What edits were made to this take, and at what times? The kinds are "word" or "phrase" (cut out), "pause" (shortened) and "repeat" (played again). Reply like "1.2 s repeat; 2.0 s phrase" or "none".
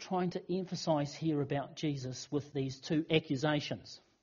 none